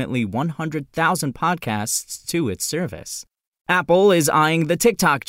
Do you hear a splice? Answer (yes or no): no